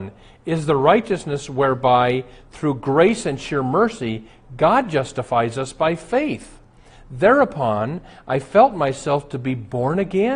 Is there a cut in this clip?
no; 0 cuts

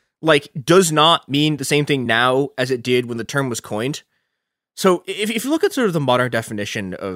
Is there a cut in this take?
no; 0 cuts

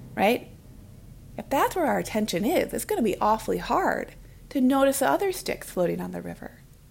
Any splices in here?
no; 0 cuts

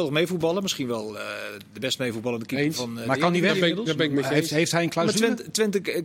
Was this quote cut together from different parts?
no; 0 cuts

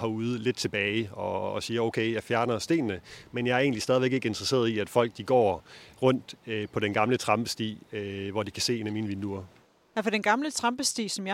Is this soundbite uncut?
yes; 0 cuts

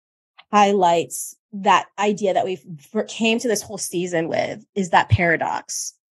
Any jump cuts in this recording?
yes; 1 cut; at 1.4 s

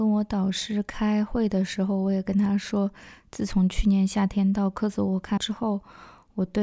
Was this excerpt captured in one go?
no; 1 cut; at 5.4 s

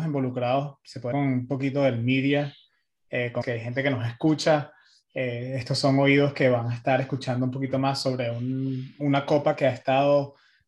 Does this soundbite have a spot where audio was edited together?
yes; 2 cuts; at 1.1 s, 3.4 s

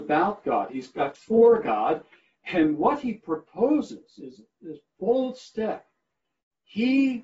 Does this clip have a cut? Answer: yes; 1 cut; at 1.1 s

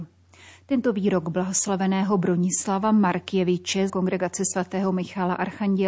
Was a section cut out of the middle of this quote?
yes; 1 cut; at 3.9 s

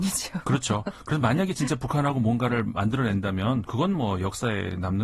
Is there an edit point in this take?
no; 0 cuts

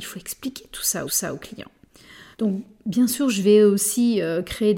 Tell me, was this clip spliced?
yes; 2 cuts; at 1.1 s, 2.3 s

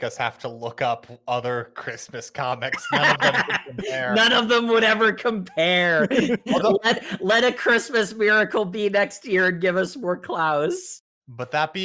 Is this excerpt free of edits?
yes; 0 cuts

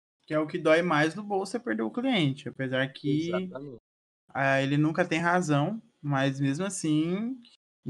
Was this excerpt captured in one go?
yes; 0 cuts

